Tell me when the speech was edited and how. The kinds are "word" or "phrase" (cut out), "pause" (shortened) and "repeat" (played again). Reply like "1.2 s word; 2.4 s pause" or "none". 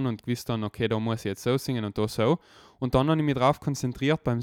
none